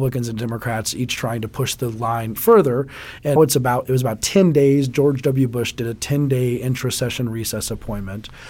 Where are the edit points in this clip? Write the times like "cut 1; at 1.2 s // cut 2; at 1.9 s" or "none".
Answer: cut 1; at 2.4 s // cut 2; at 3.4 s